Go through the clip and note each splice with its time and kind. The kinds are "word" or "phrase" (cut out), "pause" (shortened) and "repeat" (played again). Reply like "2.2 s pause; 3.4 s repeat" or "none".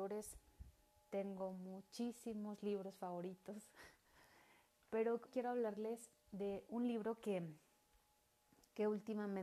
5.3 s word